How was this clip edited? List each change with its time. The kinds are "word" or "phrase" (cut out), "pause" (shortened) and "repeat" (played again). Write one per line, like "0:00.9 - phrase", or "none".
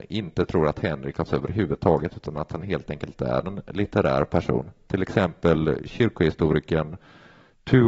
0:01.3 - word